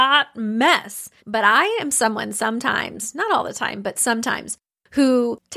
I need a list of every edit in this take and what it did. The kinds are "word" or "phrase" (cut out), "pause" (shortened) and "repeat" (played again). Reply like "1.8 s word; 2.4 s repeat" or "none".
1.2 s pause